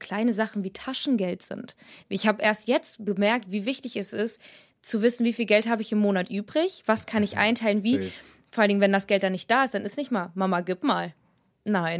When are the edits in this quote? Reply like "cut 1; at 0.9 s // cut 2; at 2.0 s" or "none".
none